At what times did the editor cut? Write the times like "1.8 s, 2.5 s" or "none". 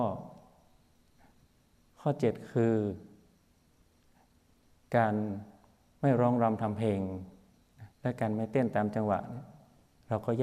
7.9 s